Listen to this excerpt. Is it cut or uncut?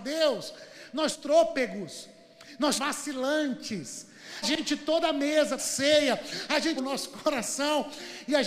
cut